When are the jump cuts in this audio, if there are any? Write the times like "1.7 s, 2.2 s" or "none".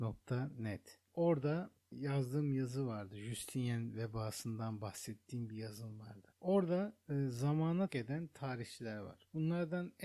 1.1 s, 6.3 s, 7.9 s